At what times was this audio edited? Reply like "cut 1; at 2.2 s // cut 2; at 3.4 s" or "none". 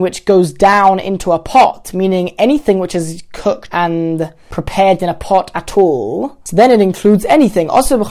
cut 1; at 3.7 s